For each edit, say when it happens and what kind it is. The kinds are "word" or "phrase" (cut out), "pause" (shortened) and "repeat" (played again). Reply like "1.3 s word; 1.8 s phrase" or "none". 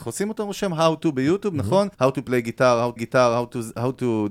1.9 s pause; 3.0 s repeat